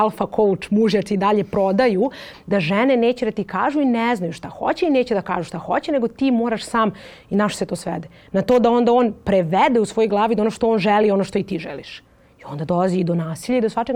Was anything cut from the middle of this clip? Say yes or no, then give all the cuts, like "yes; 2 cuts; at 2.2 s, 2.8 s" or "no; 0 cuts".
no; 0 cuts